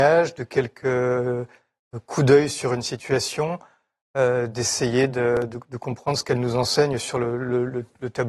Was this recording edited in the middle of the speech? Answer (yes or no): no